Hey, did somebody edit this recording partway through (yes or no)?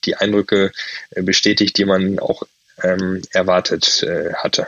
no